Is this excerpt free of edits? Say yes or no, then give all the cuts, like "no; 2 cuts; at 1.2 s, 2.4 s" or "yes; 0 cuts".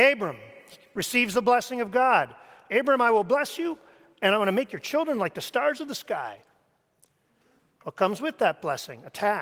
yes; 0 cuts